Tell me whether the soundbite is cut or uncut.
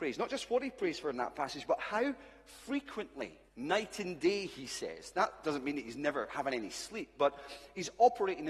cut